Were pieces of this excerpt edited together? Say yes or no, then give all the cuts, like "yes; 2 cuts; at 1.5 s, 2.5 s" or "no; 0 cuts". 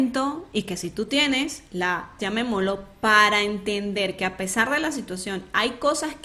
yes; 1 cut; at 2.2 s